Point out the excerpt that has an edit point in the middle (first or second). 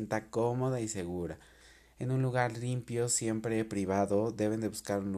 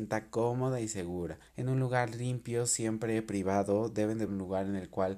second